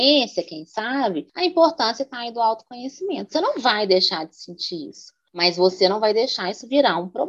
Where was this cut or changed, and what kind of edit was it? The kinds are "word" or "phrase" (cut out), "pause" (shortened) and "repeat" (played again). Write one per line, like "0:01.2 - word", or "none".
none